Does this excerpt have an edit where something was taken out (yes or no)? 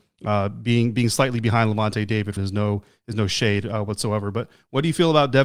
yes